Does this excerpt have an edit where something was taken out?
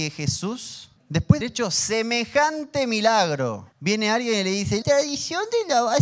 yes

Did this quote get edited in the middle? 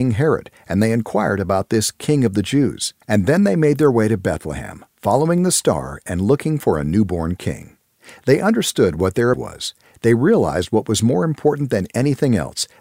yes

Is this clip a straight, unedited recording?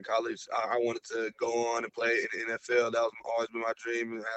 yes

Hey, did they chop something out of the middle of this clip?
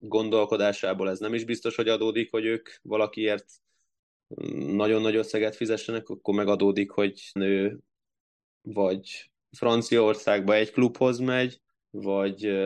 yes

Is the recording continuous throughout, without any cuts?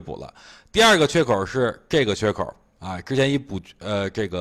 yes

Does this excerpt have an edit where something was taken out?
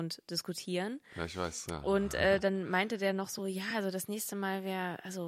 no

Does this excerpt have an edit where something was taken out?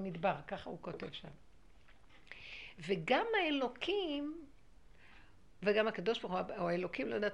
no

